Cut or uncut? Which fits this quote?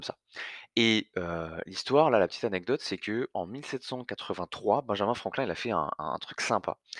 uncut